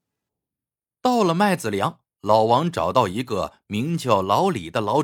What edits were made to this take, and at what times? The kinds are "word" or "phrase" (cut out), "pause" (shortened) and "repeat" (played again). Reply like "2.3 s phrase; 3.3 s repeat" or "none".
2.1 s pause